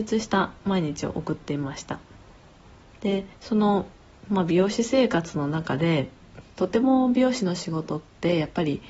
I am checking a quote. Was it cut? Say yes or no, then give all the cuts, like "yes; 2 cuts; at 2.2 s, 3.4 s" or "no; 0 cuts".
yes; 2 cuts; at 3.3 s, 6.5 s